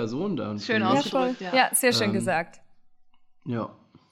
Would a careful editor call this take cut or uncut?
uncut